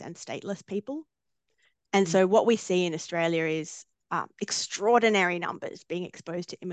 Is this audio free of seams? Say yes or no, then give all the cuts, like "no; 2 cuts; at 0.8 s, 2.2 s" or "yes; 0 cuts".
yes; 0 cuts